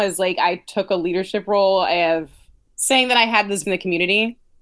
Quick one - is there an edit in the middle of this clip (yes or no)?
yes